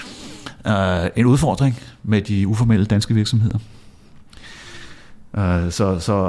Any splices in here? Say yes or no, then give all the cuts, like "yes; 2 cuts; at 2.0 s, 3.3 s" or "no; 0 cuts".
no; 0 cuts